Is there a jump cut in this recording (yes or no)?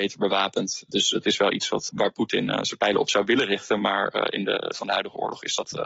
yes